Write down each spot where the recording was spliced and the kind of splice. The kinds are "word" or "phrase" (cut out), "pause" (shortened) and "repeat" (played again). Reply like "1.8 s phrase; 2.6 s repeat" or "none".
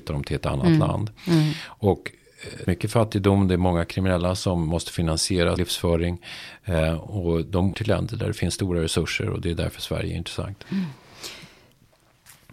2.6 s phrase; 5.6 s word; 7.7 s word